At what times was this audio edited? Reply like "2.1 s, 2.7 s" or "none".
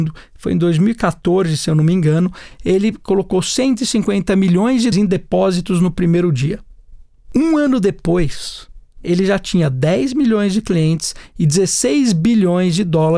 4.9 s